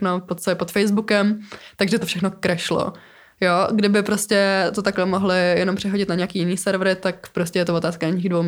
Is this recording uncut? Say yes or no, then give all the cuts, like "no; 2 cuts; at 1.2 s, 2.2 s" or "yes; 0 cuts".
yes; 0 cuts